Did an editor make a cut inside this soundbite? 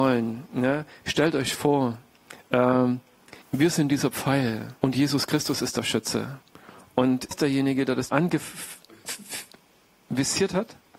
yes; 4 cuts; at 3.4 s, 4.8 s, 7.3 s, 8.1 s

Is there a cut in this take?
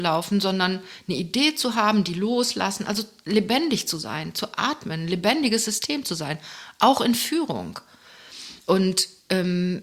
yes; 1 cut; at 8.6 s

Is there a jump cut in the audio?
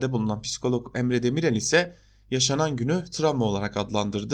no; 0 cuts

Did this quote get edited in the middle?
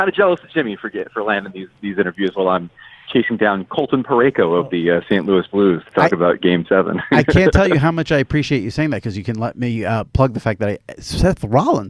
no; 0 cuts

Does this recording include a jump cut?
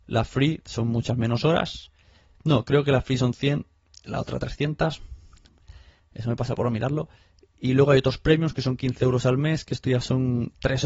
no; 0 cuts

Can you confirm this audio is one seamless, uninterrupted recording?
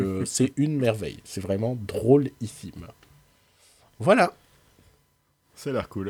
yes; 0 cuts

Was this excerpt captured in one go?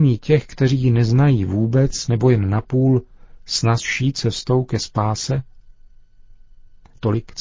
yes; 0 cuts

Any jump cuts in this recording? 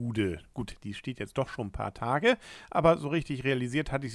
no; 0 cuts

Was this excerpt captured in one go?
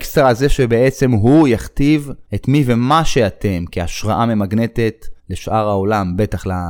no; 2 cuts; at 2.3 s, 5.2 s

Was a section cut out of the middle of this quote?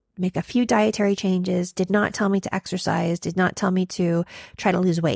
no; 0 cuts

